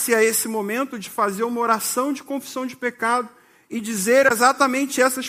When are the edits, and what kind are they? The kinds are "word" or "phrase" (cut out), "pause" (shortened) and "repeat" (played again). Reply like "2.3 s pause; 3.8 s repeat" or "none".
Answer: none